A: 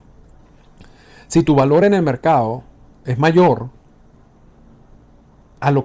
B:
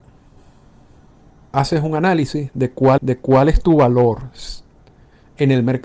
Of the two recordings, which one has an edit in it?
B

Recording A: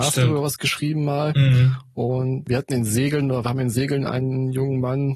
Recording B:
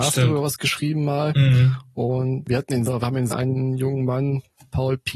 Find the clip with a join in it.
B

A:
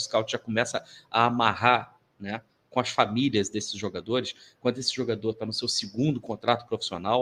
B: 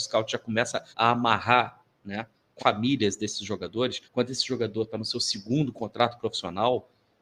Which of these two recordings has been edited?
B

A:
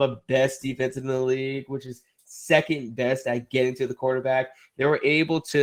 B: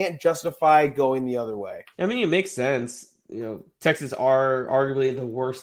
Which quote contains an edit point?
B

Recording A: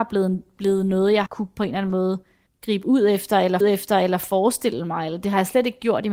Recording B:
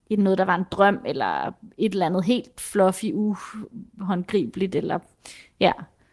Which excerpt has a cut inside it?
A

